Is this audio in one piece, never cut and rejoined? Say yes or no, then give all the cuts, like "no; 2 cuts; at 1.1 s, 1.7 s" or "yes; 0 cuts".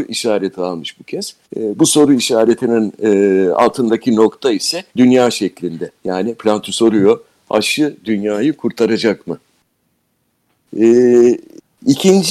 no; 3 cuts; at 1.4 s, 4.9 s, 6.0 s